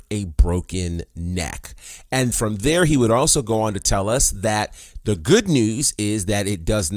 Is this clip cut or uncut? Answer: cut